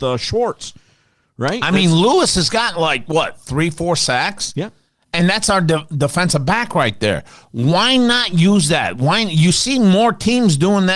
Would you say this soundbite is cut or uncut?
uncut